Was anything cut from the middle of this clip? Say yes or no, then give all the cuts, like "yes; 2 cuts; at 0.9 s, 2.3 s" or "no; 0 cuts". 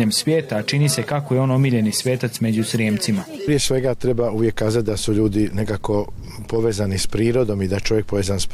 no; 0 cuts